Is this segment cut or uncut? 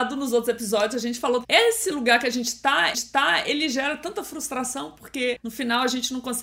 cut